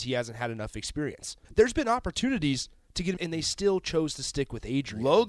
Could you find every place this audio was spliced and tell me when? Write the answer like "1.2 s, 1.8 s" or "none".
1.4 s, 3.2 s